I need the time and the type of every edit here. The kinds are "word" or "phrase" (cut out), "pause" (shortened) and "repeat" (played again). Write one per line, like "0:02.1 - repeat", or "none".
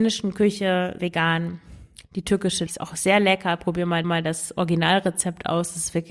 0:01.0 - word
0:02.7 - phrase
0:04.0 - repeat